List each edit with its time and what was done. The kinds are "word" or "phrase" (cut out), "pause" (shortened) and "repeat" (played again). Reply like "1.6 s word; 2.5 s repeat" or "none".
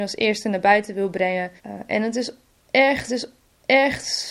1.6 s pause; 3.1 s repeat